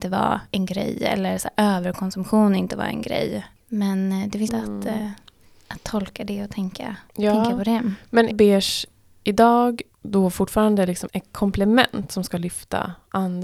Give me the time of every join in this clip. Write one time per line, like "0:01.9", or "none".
0:04.5
0:07.1
0:08.3
0:09.9
0:11.1